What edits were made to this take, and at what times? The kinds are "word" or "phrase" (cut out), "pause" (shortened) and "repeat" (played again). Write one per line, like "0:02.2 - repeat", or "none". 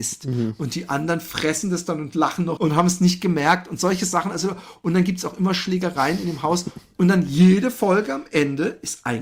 0:02.6 - word